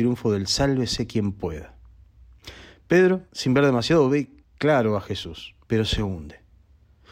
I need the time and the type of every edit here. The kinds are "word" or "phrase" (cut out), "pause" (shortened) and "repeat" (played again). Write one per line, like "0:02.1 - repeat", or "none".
0:03.3 - pause
0:04.4 - pause
0:05.6 - pause